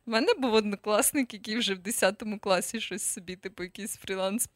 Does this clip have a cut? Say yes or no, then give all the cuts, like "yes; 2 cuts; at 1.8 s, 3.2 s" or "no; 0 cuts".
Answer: no; 0 cuts